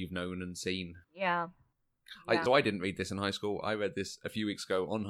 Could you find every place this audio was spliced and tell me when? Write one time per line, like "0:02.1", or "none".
0:01.0
0:02.5